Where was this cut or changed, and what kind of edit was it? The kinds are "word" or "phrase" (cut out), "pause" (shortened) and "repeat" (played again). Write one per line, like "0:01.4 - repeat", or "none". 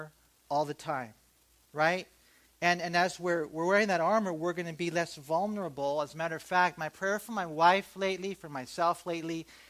none